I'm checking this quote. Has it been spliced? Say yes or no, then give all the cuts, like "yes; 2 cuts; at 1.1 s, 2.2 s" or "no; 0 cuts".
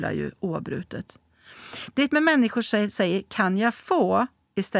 yes; 2 cuts; at 2.1 s, 2.9 s